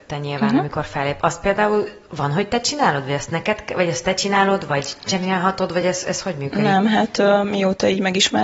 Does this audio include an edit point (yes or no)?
no